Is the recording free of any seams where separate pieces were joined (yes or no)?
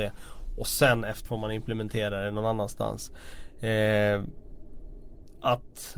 no